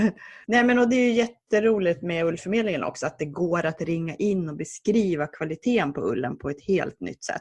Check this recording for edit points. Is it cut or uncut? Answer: uncut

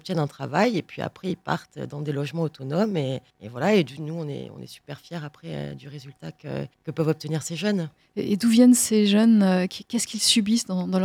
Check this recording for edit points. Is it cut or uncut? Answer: cut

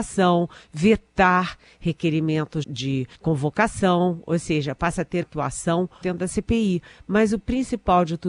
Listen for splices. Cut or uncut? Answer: cut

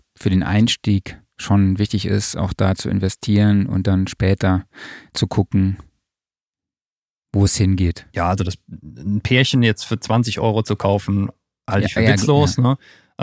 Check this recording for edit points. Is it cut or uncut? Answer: uncut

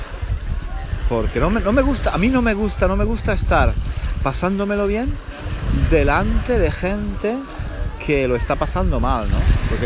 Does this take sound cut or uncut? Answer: uncut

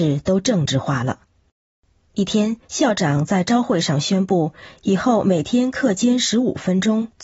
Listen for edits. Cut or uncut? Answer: cut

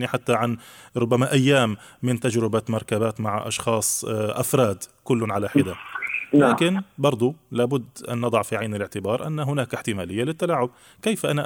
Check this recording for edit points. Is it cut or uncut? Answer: uncut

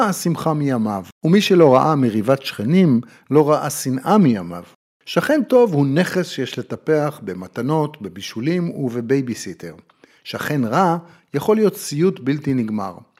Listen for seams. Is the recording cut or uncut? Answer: uncut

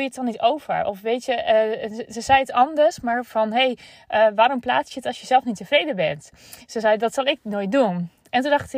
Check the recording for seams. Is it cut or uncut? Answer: uncut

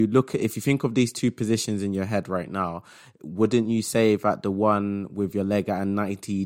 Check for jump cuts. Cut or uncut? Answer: uncut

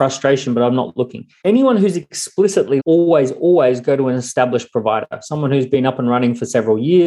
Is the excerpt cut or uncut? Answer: cut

